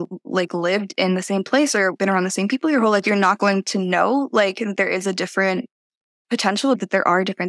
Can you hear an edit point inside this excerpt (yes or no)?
no